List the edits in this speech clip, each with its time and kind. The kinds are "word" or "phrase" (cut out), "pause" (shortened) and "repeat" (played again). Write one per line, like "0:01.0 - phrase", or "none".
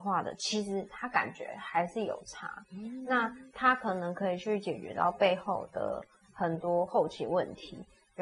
0:02.6 - pause